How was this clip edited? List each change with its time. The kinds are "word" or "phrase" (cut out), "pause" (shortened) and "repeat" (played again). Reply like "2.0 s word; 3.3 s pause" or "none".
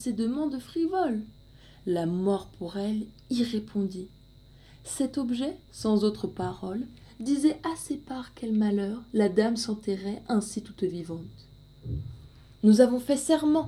5.6 s pause